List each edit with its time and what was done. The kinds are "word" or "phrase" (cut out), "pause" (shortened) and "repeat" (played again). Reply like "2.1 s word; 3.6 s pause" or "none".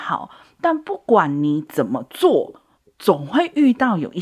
2.8 s pause